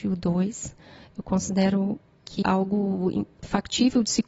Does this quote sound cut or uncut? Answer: cut